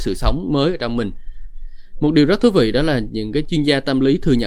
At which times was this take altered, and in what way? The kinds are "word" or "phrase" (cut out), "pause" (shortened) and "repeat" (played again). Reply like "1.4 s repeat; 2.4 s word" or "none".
none